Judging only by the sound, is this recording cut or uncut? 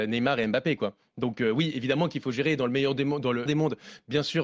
cut